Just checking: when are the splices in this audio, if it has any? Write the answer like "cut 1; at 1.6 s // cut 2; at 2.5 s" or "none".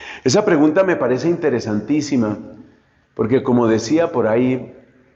none